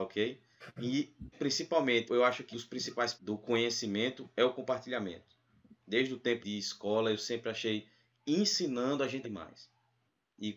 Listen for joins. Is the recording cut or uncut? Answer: cut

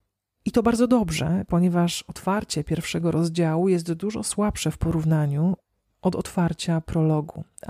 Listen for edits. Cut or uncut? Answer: uncut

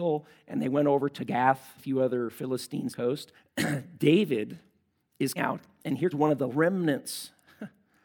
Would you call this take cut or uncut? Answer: cut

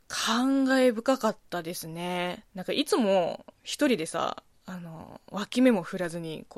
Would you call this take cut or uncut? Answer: cut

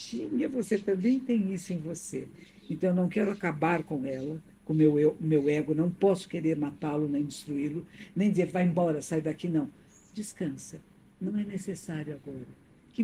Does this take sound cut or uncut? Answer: uncut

